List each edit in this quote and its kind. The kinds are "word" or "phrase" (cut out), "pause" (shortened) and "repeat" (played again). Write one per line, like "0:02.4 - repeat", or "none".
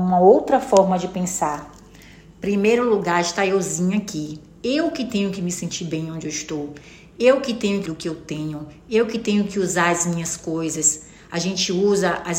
0:07.9 - word

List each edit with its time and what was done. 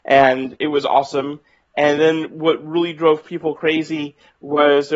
none

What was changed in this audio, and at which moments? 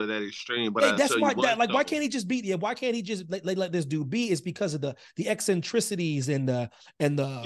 none

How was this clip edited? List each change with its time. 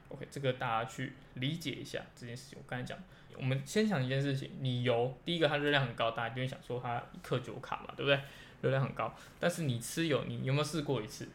0:03.3 - phrase

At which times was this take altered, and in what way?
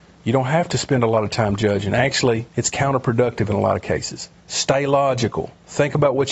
0:02.5 - pause
0:04.4 - pause

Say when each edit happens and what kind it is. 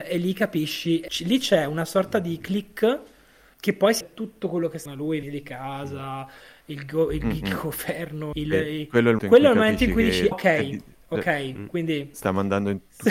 0:01.1 - word
0:03.5 - word
0:04.0 - word
0:04.9 - word
0:05.2 - word
0:08.3 - word
0:09.2 - word
0:10.3 - word

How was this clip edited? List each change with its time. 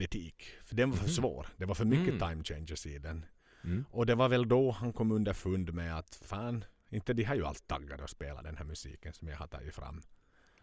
none

